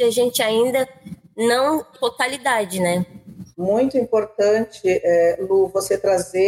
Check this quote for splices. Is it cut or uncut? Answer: cut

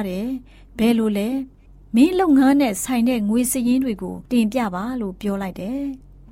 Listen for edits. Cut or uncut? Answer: cut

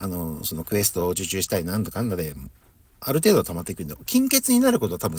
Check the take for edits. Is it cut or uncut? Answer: uncut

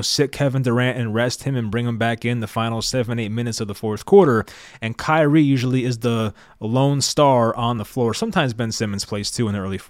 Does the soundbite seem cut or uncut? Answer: uncut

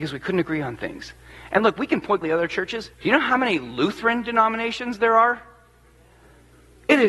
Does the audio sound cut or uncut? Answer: cut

